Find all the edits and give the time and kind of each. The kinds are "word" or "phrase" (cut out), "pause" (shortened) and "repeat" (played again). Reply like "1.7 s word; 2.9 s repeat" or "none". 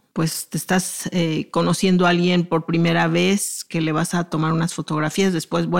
none